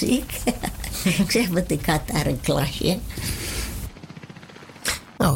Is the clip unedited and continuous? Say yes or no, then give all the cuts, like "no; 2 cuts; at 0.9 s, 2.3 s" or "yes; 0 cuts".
yes; 0 cuts